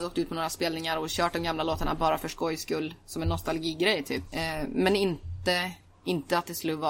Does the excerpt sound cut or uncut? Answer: uncut